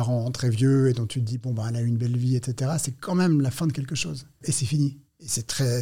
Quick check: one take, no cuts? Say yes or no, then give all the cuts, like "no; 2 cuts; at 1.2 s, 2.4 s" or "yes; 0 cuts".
yes; 0 cuts